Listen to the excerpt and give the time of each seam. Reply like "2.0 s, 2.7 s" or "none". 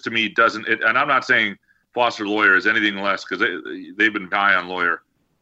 4.3 s